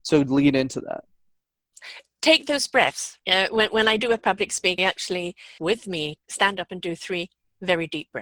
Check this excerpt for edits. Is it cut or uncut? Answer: cut